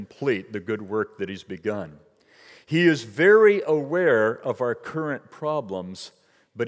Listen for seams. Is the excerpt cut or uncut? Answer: uncut